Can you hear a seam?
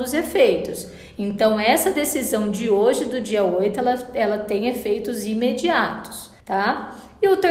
yes; 1 cut; at 6.4 s

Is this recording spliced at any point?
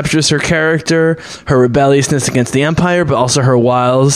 no; 0 cuts

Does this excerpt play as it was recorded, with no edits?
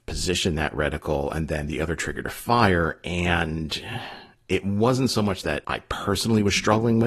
yes; 0 cuts

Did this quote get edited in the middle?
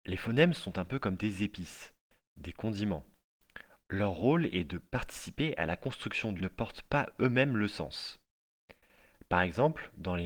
yes; 1 cut; at 6.4 s

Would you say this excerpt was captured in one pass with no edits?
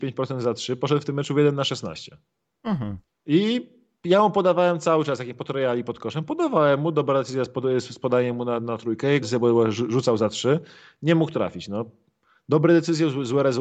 no; 1 cut; at 9.2 s

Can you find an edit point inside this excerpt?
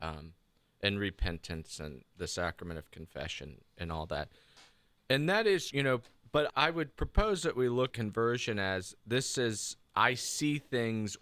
yes; 4 cuts; at 5.7 s, 6.5 s, 7.9 s, 9.8 s

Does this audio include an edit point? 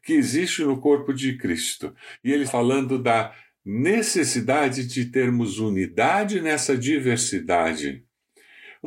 yes; 1 cut; at 2.5 s

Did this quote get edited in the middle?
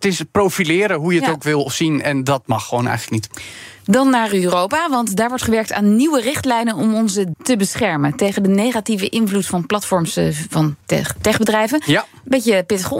yes; 2 cuts; at 7.3 s, 10.8 s

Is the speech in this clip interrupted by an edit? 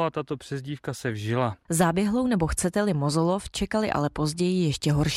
no; 0 cuts

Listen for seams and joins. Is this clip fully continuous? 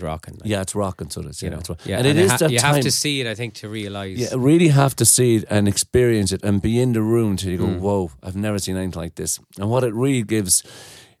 yes; 0 cuts

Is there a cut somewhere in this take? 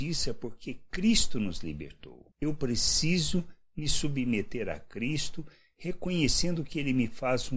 no; 0 cuts

